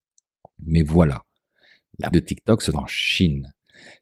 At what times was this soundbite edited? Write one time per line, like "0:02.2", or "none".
0:02.1
0:02.7